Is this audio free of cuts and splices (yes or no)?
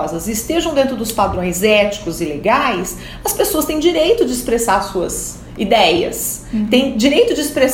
yes